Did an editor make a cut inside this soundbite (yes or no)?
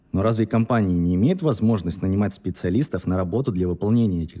no